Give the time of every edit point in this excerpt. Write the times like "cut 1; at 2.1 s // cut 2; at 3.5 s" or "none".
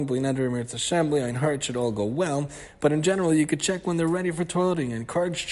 none